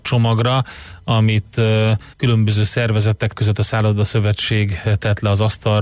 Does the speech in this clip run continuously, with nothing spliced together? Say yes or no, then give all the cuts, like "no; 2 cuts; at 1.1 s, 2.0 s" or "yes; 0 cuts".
no; 2 cuts; at 2.1 s, 3.3 s